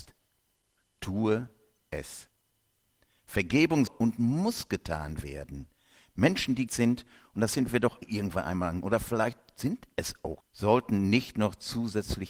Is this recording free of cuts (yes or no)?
no